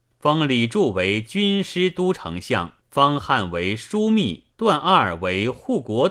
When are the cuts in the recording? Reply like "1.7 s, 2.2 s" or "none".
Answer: 2.8 s, 4.5 s